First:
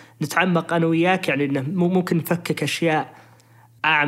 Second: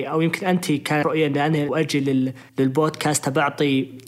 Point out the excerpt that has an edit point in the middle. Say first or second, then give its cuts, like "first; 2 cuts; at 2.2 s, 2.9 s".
second; 3 cuts; at 1.0 s, 1.7 s, 2.5 s